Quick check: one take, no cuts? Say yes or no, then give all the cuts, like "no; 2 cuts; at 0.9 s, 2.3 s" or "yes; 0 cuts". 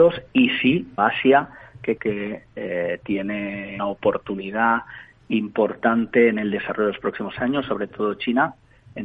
no; 3 cuts; at 1.0 s, 2.0 s, 3.8 s